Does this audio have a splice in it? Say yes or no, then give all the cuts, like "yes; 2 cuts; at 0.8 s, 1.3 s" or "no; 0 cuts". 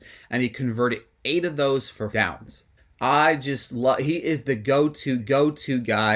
yes; 3 cuts; at 2.1 s, 2.8 s, 5.2 s